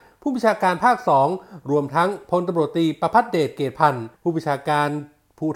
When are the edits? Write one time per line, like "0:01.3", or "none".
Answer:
0:04.1